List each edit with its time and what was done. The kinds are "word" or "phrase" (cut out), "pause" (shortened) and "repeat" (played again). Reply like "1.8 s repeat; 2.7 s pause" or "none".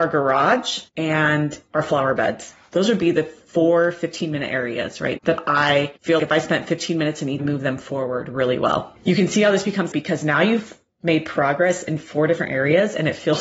5.2 s word; 6.2 s word; 7.4 s phrase; 9.9 s word